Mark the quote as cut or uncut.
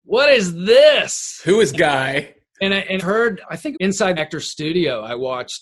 cut